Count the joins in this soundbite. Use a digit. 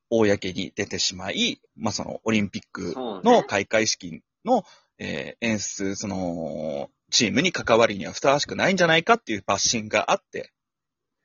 1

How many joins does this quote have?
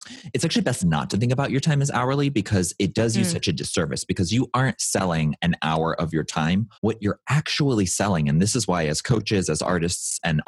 1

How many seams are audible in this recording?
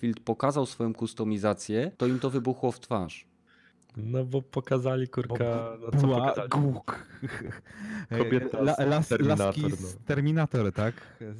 1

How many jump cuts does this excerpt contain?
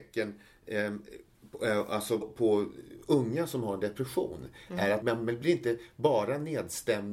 2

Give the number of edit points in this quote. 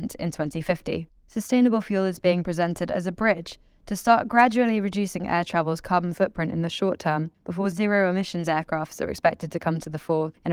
1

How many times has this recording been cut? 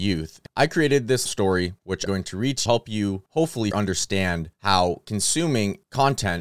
4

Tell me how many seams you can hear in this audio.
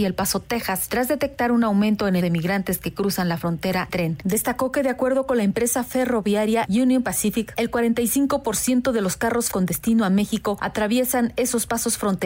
3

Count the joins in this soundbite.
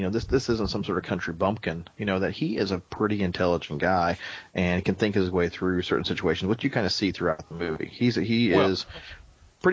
0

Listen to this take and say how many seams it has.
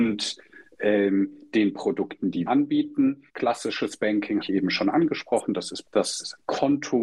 4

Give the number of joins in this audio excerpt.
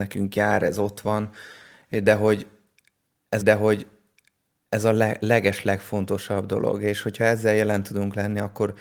1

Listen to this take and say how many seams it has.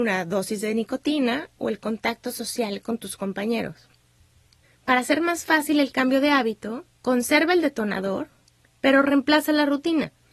2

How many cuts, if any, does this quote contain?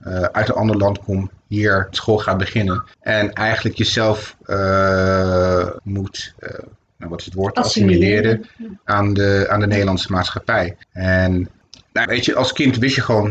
3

